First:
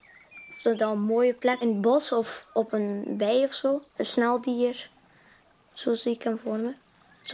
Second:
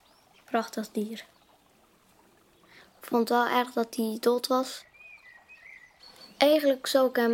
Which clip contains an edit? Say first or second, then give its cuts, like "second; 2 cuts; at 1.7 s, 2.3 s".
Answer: first; 2 cuts; at 1.6 s, 3.9 s